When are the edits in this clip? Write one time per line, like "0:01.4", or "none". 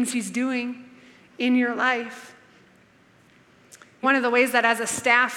0:04.0